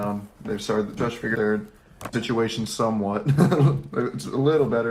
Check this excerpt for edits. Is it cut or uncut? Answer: cut